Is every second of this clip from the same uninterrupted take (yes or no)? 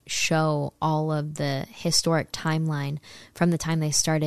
yes